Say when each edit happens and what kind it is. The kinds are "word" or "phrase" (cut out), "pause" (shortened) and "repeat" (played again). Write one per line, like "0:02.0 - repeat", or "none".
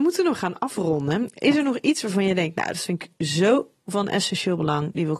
none